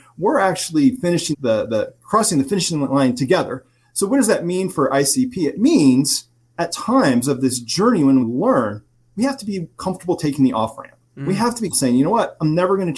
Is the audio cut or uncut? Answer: cut